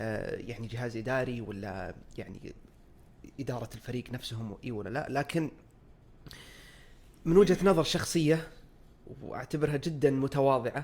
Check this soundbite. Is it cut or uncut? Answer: uncut